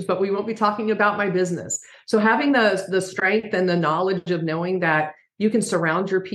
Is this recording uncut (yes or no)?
yes